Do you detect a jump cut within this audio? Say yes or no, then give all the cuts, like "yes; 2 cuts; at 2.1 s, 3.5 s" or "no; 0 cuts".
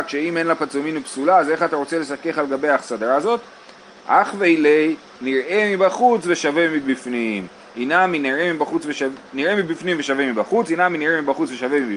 no; 0 cuts